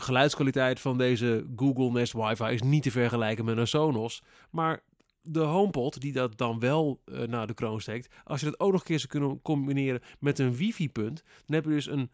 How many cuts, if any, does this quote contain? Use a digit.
0